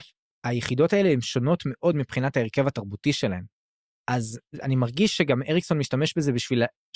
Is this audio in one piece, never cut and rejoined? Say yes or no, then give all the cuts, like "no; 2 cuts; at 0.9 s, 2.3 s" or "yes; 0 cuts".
yes; 0 cuts